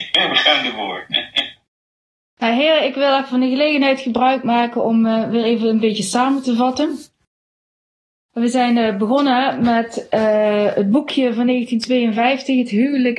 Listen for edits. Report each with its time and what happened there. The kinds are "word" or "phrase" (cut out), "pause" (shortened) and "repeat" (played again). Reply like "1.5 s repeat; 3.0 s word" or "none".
none